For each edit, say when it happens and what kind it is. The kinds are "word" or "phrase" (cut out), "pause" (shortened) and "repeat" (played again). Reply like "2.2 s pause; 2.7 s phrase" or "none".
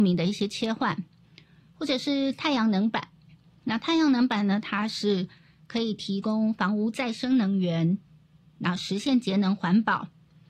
none